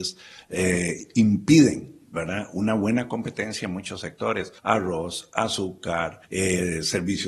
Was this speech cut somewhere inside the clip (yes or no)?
yes